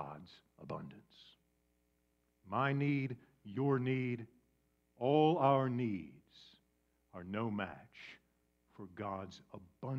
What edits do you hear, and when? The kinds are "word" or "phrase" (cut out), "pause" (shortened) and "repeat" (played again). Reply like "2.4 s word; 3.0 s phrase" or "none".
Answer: none